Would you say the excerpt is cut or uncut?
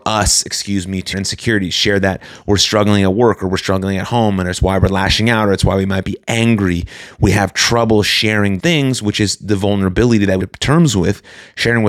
cut